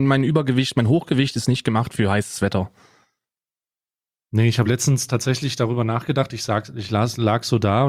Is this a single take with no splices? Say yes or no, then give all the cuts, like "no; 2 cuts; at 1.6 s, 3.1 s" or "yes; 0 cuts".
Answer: yes; 0 cuts